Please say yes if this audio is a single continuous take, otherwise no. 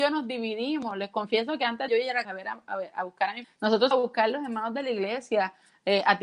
no